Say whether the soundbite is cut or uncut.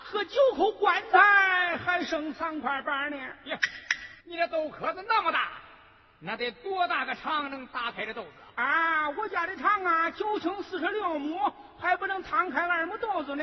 cut